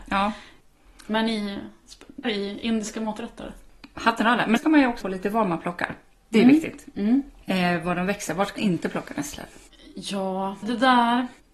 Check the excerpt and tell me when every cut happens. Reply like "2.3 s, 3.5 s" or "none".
2.2 s, 4.6 s, 5.0 s, 8.6 s, 10.6 s